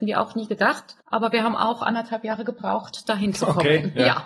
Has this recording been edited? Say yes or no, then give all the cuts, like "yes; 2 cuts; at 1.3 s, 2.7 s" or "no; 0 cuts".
yes; 1 cut; at 1.0 s